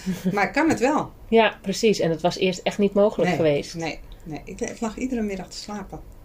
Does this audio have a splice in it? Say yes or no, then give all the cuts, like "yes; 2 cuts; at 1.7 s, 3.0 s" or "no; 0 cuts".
no; 0 cuts